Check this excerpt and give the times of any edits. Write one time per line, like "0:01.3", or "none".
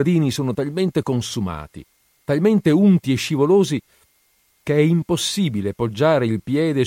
none